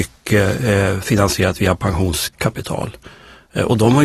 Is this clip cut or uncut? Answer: uncut